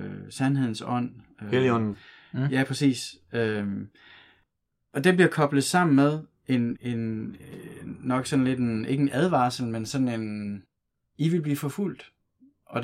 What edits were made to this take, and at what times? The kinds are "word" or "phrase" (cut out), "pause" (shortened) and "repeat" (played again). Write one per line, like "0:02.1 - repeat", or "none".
0:06.8 - word